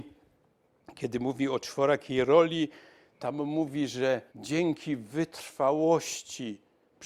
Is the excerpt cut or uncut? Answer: cut